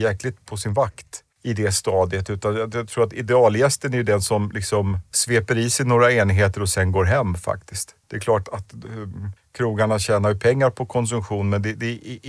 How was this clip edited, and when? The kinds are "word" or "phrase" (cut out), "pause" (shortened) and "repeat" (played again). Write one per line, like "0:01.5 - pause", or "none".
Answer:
0:01.3 - pause
0:08.0 - pause
0:08.4 - word
0:09.4 - pause